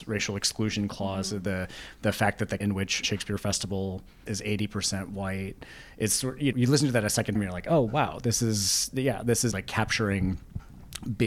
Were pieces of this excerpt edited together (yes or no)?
yes